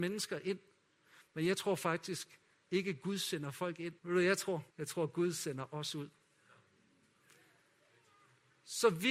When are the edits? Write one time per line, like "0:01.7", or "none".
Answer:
0:04.0
0:04.7